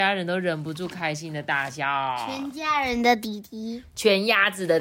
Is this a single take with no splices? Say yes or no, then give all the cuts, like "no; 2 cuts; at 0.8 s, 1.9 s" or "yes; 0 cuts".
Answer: yes; 0 cuts